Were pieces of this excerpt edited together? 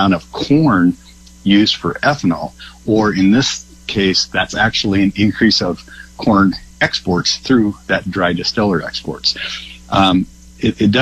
no; 0 cuts

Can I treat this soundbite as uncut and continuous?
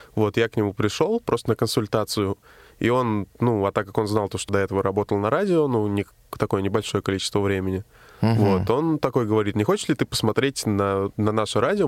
no; 1 cut; at 4.5 s

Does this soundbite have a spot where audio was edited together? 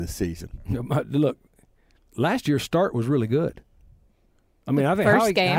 no; 0 cuts

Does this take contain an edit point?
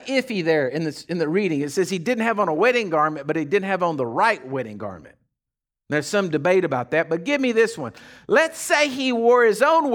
no; 0 cuts

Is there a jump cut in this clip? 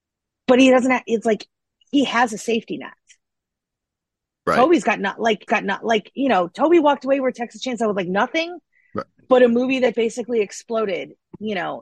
yes; 2 cuts; at 5.5 s, 9.9 s

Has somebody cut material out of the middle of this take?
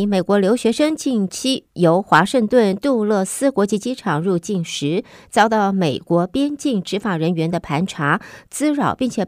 no; 0 cuts

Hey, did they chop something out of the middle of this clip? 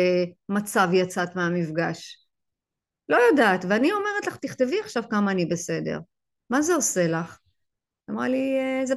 no; 0 cuts

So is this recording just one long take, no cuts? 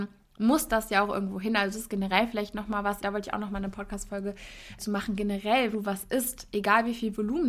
no; 3 cuts; at 3.0 s, 4.8 s, 5.7 s

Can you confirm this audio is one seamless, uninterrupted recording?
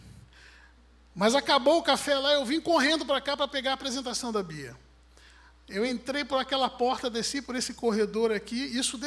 yes; 0 cuts

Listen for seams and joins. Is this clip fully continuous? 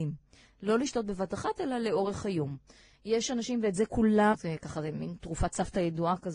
no; 1 cut; at 4.3 s

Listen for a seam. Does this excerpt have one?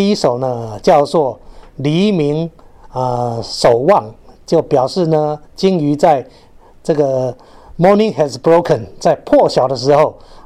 no; 0 cuts

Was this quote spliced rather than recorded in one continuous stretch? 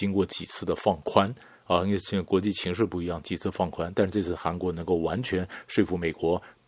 no; 0 cuts

